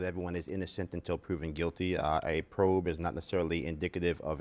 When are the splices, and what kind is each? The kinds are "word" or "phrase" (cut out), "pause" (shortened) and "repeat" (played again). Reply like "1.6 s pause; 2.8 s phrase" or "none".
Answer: none